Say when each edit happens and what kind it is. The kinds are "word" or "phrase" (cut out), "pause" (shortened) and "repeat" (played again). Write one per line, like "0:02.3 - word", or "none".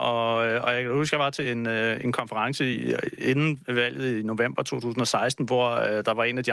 none